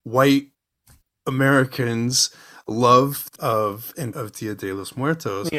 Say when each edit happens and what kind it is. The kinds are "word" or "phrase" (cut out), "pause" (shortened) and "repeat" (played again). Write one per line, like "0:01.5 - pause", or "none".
0:03.4 - word
0:04.1 - word